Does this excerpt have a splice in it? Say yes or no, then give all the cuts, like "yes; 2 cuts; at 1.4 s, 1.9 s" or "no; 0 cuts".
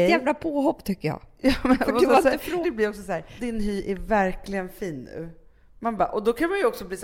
yes; 2 cuts; at 2.6 s, 3.4 s